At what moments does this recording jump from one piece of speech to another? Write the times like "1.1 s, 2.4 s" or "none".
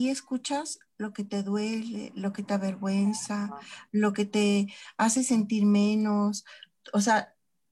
none